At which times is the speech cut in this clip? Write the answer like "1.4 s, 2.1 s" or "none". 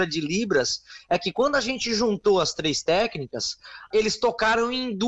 3.9 s